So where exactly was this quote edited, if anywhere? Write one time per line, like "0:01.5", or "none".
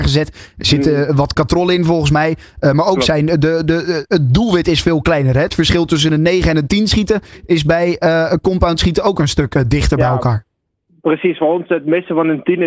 none